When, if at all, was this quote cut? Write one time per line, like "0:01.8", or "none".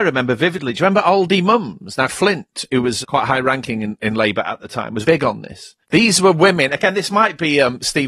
0:02.1
0:03.0
0:05.0
0:05.8